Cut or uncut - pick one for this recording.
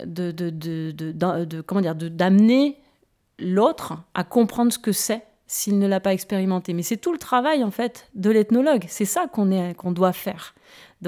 uncut